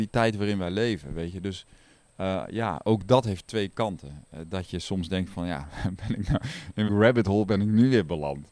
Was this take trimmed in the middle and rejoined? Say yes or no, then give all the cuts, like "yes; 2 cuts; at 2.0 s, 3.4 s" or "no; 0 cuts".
yes; 1 cut; at 6.9 s